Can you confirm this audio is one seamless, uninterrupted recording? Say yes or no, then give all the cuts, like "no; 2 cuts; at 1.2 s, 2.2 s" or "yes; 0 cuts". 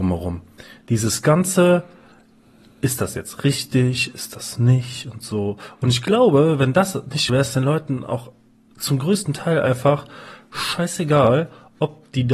no; 1 cut; at 7.3 s